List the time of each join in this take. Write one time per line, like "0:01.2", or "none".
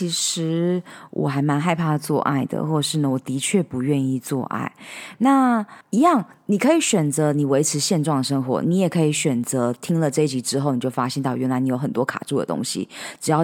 0:05.8